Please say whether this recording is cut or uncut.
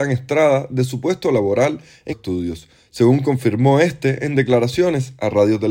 cut